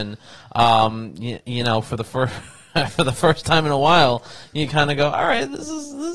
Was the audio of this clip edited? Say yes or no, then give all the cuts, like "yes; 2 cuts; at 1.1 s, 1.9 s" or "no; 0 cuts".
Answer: no; 0 cuts